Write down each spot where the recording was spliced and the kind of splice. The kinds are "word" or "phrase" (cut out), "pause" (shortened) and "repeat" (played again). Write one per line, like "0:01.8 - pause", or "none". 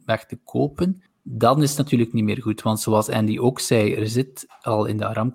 0:01.1 - pause